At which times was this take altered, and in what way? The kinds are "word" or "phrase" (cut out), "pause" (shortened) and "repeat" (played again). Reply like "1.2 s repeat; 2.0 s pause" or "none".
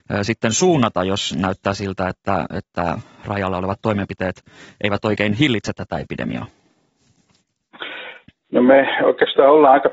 none